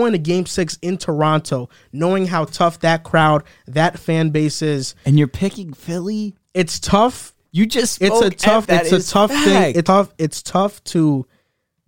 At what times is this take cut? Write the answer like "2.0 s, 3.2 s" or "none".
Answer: 6.4 s, 8.6 s, 9.9 s